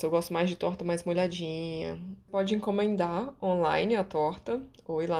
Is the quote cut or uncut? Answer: uncut